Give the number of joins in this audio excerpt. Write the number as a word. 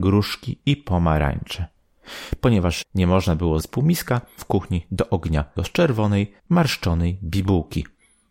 five